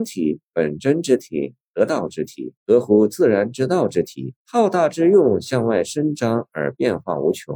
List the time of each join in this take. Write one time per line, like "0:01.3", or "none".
0:02.6
0:04.4